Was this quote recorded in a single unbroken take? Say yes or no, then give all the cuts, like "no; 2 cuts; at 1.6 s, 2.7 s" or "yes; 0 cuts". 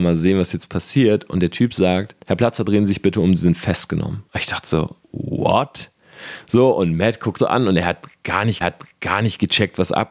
no; 5 cuts; at 2.2 s, 4.3 s, 5.0 s, 7.4 s, 8.6 s